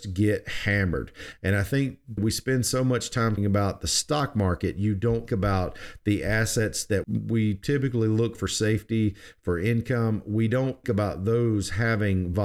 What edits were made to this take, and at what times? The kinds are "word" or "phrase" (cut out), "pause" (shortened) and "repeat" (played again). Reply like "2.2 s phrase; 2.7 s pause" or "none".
2.2 s word; 3.4 s word; 5.3 s word; 7.0 s word; 8.3 s word; 10.8 s word